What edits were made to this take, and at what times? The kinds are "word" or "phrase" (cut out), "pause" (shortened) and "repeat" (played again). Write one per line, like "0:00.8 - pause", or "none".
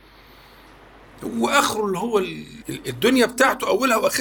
0:02.6 - word